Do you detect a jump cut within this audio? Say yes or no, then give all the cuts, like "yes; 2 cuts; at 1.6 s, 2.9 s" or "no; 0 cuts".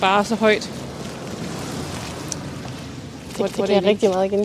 yes; 1 cut; at 3.5 s